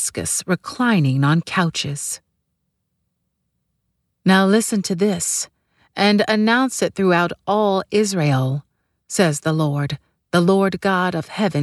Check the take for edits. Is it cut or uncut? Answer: uncut